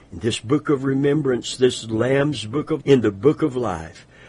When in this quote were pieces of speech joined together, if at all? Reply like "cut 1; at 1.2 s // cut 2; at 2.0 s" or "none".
cut 1; at 2.8 s

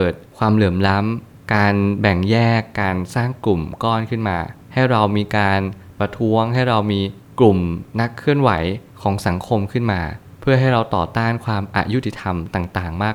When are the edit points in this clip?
cut 1; at 7.9 s

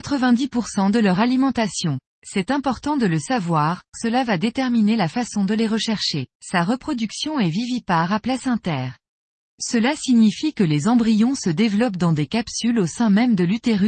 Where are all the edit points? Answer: cut 1; at 2.0 s // cut 2; at 3.9 s // cut 3; at 6.3 s

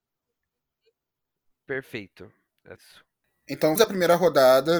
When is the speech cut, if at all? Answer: cut 1; at 2.8 s // cut 2; at 3.8 s

